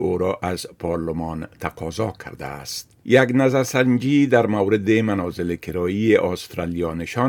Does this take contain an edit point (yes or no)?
yes